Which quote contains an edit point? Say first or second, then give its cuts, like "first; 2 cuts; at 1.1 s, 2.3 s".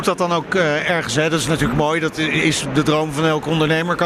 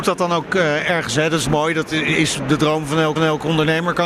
second; 2 cuts; at 1.5 s, 3.2 s